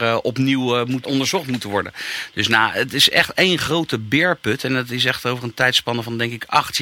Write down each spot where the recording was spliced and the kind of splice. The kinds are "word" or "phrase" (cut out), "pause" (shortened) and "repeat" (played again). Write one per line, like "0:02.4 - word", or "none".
0:01.0 - word